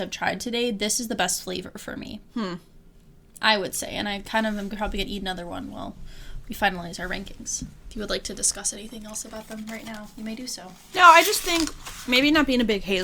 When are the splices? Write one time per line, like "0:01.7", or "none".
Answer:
none